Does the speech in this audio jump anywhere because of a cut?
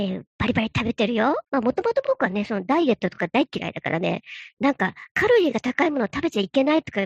yes; 1 cut; at 1.5 s

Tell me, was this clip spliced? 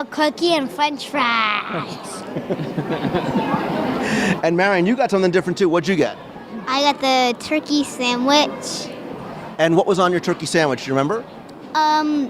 no; 0 cuts

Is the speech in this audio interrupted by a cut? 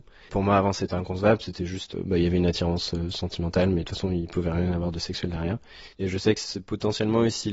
yes; 1 cut; at 5.9 s

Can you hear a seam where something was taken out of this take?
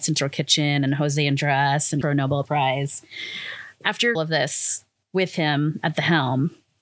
yes; 4 cuts; at 2.0 s, 2.4 s, 4.1 s, 5.0 s

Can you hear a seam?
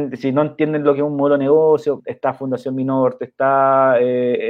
yes; 1 cut; at 2.0 s

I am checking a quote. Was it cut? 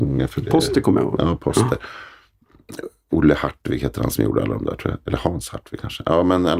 no; 0 cuts

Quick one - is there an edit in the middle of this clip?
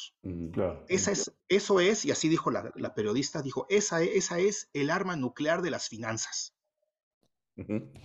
yes; 2 cuts; at 1.4 s, 2.7 s

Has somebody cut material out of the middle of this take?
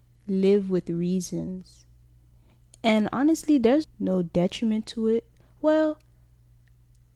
yes; 1 cut; at 3.8 s

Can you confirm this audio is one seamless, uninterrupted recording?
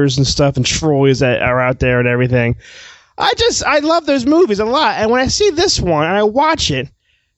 yes; 0 cuts

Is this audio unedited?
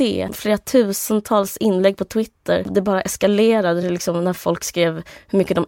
yes; 0 cuts

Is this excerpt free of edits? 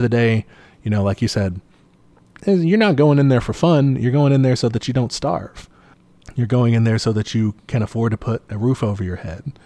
yes; 0 cuts

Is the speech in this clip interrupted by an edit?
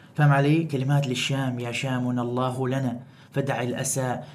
no; 0 cuts

